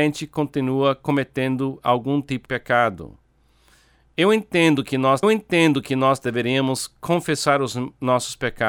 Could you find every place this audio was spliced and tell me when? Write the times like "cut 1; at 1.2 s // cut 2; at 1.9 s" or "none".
cut 1; at 2.4 s // cut 2; at 5.2 s

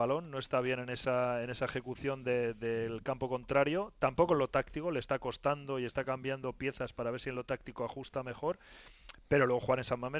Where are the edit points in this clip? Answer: none

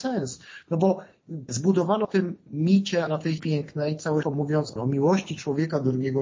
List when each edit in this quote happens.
cut 1; at 1.5 s // cut 2; at 2.0 s // cut 3; at 3.1 s // cut 4; at 3.4 s // cut 5; at 4.2 s // cut 6; at 4.8 s

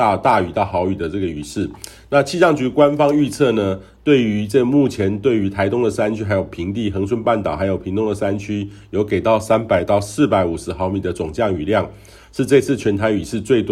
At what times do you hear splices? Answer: none

